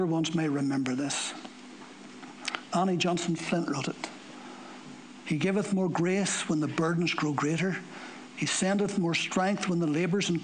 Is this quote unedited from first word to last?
yes; 0 cuts

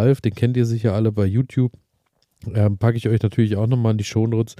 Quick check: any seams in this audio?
no; 0 cuts

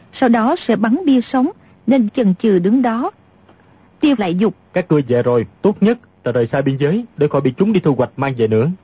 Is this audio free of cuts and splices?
no; 5 cuts; at 2.1 s, 4.2 s, 4.6 s, 5.5 s, 7.1 s

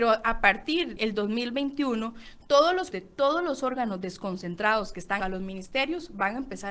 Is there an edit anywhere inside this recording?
yes; 3 cuts; at 1.0 s, 2.9 s, 5.2 s

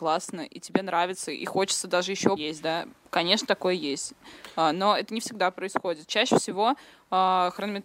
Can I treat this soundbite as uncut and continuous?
no; 1 cut; at 2.4 s

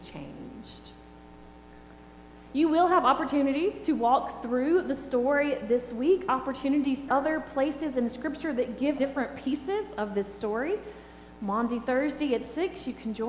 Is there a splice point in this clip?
yes; 2 cuts; at 7.1 s, 9.0 s

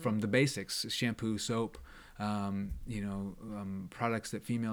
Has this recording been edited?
no; 0 cuts

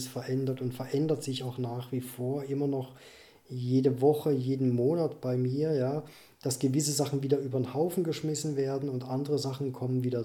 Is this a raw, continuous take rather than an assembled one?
yes; 0 cuts

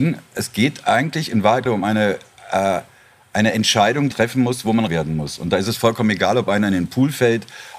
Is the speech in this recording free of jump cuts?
no; 3 cuts; at 1.7 s, 4.1 s, 4.9 s

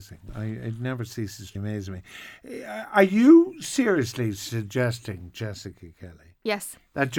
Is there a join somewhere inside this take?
yes; 1 cut; at 1.6 s

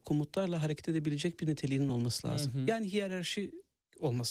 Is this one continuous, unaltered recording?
yes; 0 cuts

